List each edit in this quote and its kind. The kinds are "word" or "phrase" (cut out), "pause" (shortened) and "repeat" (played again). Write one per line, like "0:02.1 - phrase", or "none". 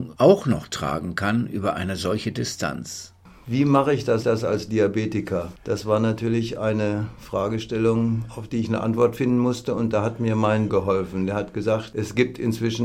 0:04.2 - repeat
0:10.7 - word